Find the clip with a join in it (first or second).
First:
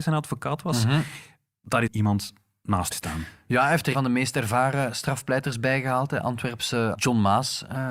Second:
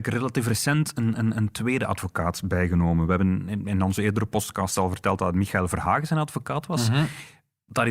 first